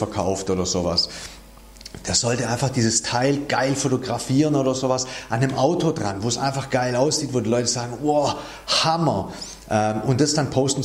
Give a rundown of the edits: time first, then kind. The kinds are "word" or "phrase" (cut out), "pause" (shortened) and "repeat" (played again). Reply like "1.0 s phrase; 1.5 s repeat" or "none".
none